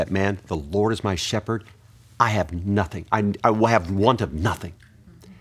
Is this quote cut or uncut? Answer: uncut